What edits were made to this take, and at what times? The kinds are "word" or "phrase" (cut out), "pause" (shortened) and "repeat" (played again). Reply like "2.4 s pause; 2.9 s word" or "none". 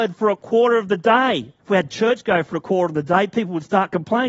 1.6 s pause